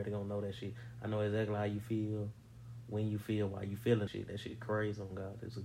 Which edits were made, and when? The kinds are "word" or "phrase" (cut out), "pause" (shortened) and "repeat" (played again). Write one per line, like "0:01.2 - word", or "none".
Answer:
0:04.1 - word